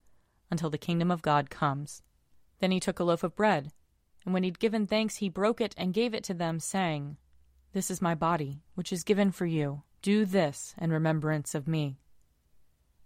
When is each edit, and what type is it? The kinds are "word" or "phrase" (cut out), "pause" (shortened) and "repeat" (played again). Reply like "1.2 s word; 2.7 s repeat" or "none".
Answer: 9.9 s pause